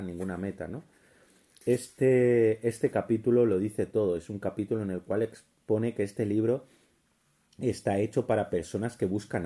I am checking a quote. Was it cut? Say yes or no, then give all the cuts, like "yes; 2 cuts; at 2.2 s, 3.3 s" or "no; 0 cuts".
no; 0 cuts